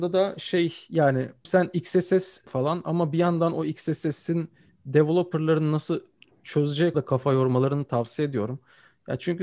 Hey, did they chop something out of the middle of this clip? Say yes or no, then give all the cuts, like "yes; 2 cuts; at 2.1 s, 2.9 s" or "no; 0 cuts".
yes; 3 cuts; at 1.4 s, 2.5 s, 6.9 s